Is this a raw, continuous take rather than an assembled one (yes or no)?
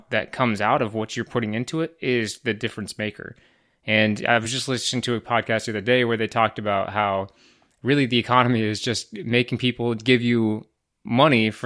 yes